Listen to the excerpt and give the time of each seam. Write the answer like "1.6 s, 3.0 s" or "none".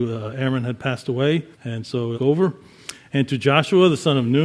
1.5 s, 2.1 s